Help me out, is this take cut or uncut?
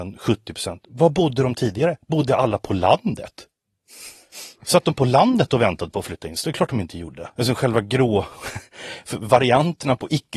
cut